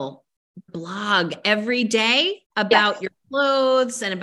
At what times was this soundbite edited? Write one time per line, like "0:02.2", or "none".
0:02.5